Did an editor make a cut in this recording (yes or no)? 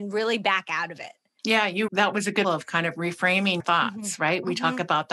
yes